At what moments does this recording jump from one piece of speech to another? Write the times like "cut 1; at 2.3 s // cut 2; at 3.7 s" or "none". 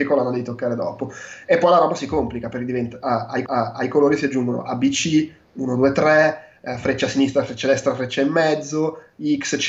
cut 1; at 3.5 s